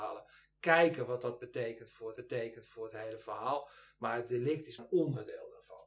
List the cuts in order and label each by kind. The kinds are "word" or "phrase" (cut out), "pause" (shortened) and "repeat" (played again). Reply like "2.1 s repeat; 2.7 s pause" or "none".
2.2 s repeat; 4.8 s word